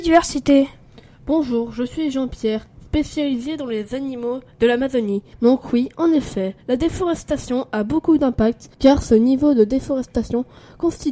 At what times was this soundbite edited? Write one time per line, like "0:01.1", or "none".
0:05.3
0:06.6
0:08.7

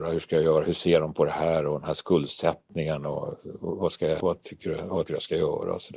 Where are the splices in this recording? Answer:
0:04.2
0:05.1

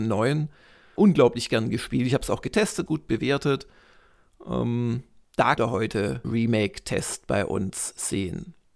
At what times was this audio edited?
0:01.0
0:02.9
0:05.6
0:06.2

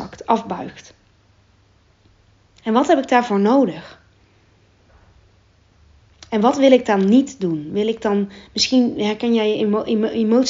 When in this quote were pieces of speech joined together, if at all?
none

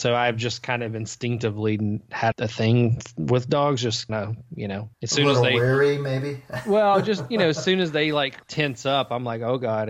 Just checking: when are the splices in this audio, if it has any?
0:02.3
0:04.1
0:04.9
0:08.4

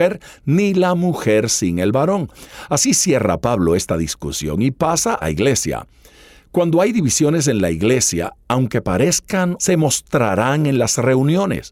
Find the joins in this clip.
0:05.2
0:09.6

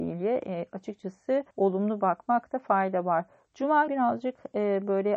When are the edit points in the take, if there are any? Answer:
0:01.5
0:03.9

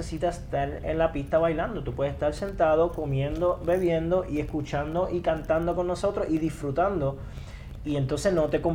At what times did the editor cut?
none

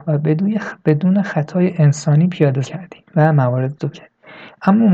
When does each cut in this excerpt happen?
0:02.6
0:03.1
0:03.9

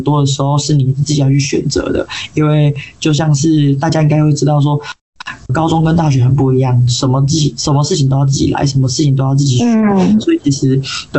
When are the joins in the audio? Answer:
0:05.5

